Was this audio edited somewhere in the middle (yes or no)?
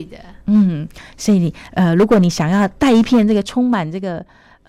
no